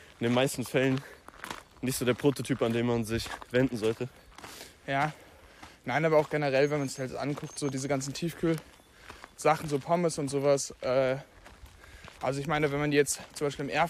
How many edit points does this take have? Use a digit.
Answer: 0